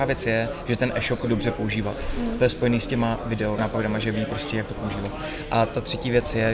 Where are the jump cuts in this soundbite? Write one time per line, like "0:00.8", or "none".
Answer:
0:01.2
0:03.2
0:03.6